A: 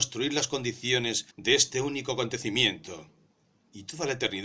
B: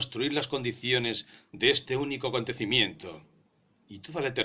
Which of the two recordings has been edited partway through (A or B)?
A